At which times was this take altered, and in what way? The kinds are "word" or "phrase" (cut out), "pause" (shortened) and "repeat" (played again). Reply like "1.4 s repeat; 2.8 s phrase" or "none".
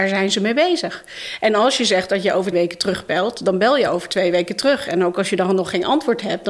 2.5 s word